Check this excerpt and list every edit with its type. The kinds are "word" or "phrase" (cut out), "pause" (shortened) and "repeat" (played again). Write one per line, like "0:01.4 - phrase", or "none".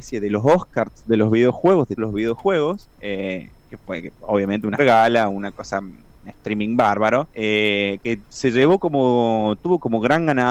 0:02.0 - word
0:02.9 - pause
0:04.8 - word
0:07.3 - pause